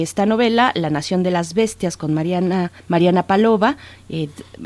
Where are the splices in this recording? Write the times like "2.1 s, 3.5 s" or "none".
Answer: 2.8 s